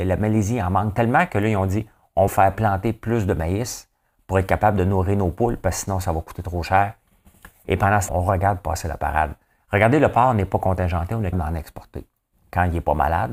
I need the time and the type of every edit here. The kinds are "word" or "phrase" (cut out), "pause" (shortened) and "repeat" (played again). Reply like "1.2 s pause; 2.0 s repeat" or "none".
2.3 s word; 8.1 s word; 11.3 s word